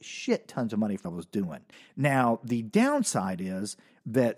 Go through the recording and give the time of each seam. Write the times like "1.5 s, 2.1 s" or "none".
1.0 s, 1.7 s